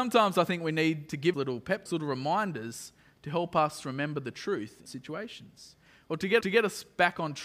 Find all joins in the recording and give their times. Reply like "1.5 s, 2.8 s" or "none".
1.3 s, 1.9 s, 4.9 s, 6.4 s